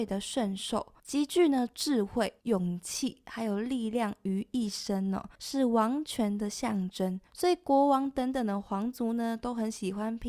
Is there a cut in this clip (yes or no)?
yes